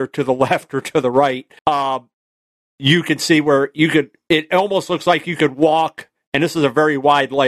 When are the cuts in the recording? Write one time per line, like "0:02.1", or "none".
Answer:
0:01.6